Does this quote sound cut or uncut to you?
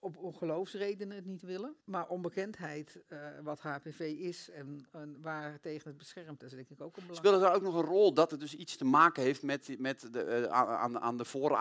cut